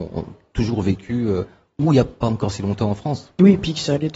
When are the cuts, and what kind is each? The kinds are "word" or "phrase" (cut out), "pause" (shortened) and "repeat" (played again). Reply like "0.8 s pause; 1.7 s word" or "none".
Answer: none

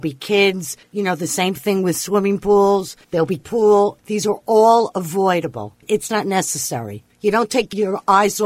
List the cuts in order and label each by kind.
3.0 s pause; 3.4 s phrase; 6.1 s word

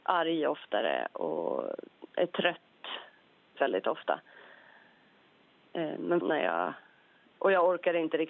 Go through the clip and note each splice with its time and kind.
2.1 s pause; 3.6 s word; 6.2 s phrase

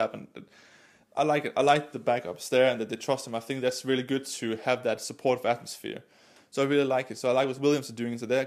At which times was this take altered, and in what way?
none

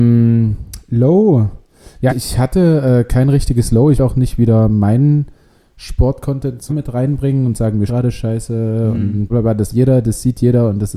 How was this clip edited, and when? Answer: 2.1 s word; 4.0 s word; 6.7 s word; 7.9 s word; 9.3 s word; 9.7 s word

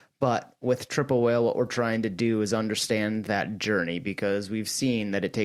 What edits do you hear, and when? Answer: none

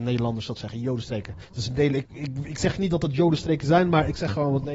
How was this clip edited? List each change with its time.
1.4 s pause; 2.1 s word

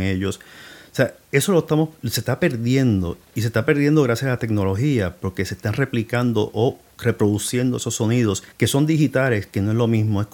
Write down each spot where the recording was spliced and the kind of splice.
8.5 s pause

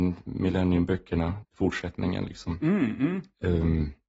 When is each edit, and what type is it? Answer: 1.4 s word

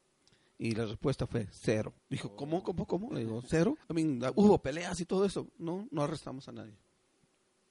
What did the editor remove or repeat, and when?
2.0 s pause; 3.8 s pause

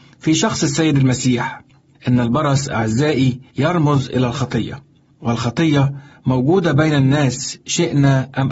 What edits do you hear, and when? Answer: 3.5 s pause

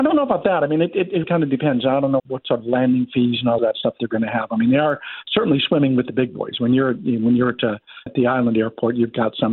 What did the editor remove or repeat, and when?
1.2 s word; 2.2 s word; 3.6 s phrase; 8.1 s word

